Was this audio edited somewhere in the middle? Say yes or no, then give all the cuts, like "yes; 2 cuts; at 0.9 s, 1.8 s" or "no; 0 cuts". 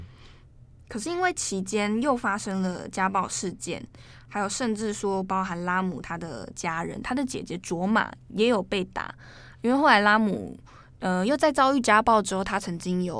no; 0 cuts